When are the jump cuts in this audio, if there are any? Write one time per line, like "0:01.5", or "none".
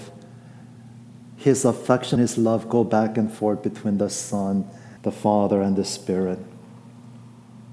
0:02.2
0:05.0